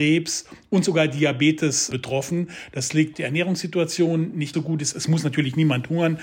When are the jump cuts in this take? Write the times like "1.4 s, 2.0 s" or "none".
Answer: 3.1 s, 4.5 s